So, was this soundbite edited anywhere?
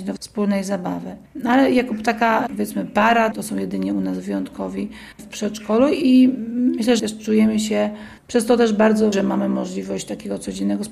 yes; 6 cuts; at 1.3 s, 3.3 s, 5.1 s, 7.0 s, 8.2 s, 9.1 s

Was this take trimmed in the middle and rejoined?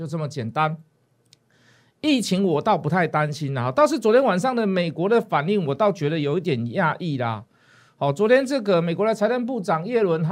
no; 0 cuts

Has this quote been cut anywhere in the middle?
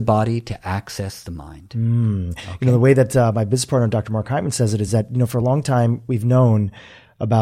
no; 0 cuts

